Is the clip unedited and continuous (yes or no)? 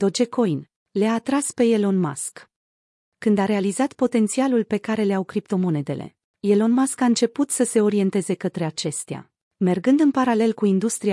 yes